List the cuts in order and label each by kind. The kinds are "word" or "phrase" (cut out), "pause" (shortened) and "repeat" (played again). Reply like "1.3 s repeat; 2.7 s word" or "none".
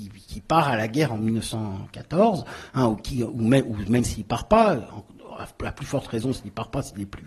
none

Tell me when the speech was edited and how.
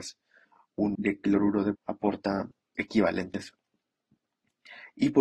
0.9 s word; 1.7 s word; 2.7 s word

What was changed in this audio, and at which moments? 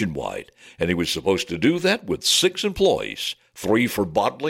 none

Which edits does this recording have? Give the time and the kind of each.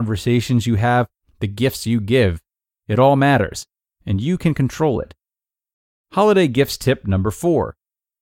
none

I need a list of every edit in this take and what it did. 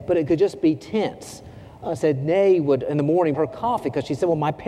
3.3 s word

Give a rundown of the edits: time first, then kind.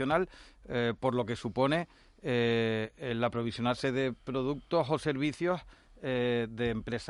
none

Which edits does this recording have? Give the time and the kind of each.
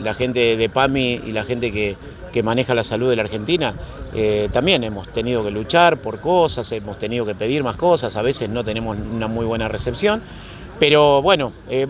none

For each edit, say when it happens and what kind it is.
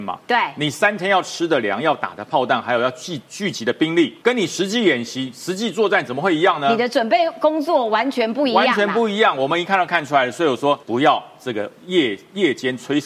4.2 s pause; 10.8 s pause

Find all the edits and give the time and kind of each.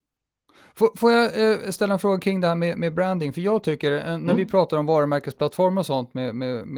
none

